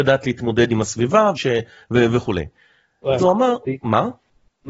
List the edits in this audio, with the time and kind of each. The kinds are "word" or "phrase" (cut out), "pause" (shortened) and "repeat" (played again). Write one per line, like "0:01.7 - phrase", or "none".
0:01.4 - word
0:03.2 - word